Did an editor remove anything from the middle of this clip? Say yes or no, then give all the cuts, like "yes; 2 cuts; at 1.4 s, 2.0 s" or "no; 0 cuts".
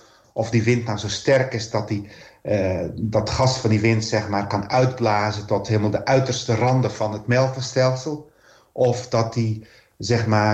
no; 0 cuts